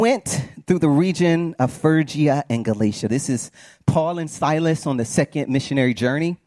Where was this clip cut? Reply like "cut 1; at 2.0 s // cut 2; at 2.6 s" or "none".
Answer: none